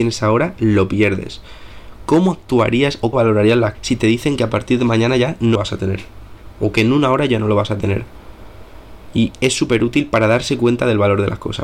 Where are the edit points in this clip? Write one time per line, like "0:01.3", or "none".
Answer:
0:03.1
0:03.7
0:05.5